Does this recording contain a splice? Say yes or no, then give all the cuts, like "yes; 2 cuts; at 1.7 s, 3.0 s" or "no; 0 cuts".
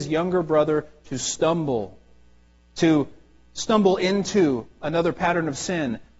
no; 0 cuts